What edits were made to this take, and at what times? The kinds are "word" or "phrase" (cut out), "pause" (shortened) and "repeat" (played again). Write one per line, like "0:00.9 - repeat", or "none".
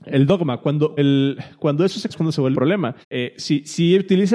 0:01.0 - word
0:02.1 - phrase
0:02.5 - word
0:03.0 - pause

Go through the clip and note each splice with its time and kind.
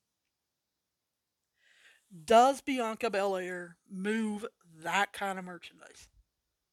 none

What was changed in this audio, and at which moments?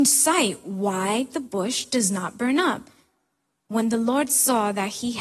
none

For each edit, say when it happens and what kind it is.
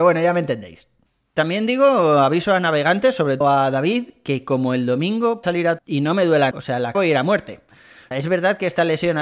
0:03.4 - word
0:05.4 - word
0:05.8 - word
0:06.5 - word
0:06.9 - word
0:08.1 - word

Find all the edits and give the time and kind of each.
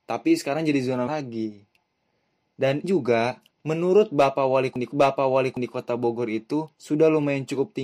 0:01.1 - word
0:02.8 - word
0:03.5 - pause
0:04.9 - repeat
0:06.7 - pause

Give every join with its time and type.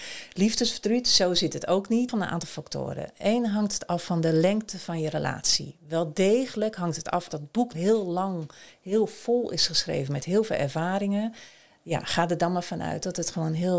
0:07.3 - word
0:07.7 - word

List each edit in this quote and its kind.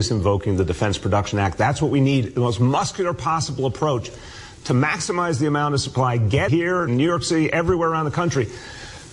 0:06.5 - phrase
0:06.9 - word

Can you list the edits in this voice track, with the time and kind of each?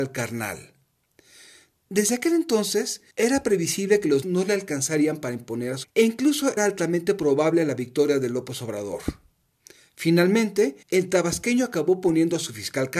0:03.1 - pause
0:04.2 - word
0:05.8 - word
0:06.6 - word
0:10.8 - pause

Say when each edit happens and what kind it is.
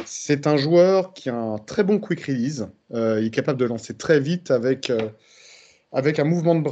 none

